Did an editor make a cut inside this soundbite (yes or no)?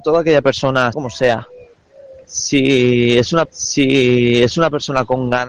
yes